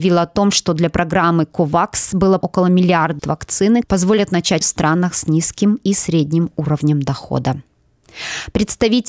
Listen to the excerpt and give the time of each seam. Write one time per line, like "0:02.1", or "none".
0:02.4
0:03.2
0:03.8
0:04.6